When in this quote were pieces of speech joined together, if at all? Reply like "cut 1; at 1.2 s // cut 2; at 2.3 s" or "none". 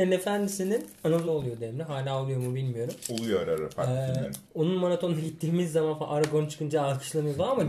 cut 1; at 1.3 s // cut 2; at 4.4 s